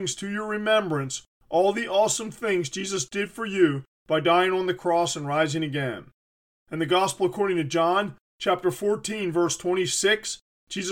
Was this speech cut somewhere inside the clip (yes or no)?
no